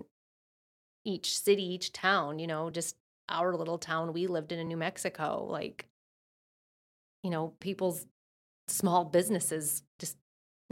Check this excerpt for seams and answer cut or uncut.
uncut